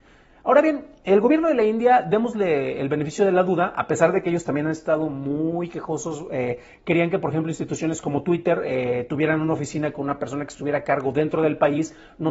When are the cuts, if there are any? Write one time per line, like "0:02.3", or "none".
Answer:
none